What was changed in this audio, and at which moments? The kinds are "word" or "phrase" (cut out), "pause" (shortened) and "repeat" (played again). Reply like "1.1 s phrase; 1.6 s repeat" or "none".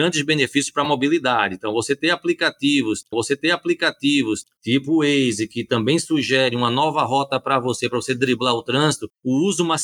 3.1 s repeat